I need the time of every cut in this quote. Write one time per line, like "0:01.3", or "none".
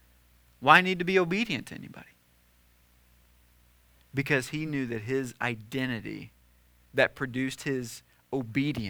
none